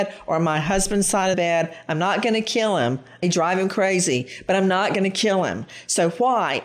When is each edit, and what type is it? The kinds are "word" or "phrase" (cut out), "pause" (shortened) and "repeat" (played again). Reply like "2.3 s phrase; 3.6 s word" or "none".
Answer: 1.3 s word; 3.2 s word